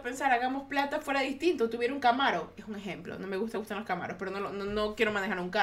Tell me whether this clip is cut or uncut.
cut